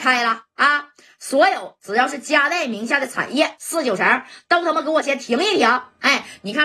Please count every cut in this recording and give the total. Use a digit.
0